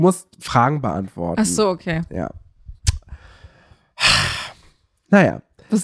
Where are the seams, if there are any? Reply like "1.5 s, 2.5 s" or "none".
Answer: none